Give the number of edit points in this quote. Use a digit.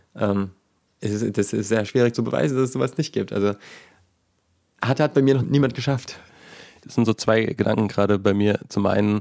1